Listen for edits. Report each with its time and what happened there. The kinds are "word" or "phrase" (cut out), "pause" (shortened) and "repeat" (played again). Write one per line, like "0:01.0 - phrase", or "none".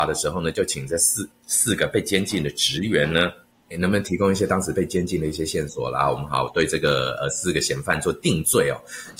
0:03.7 - word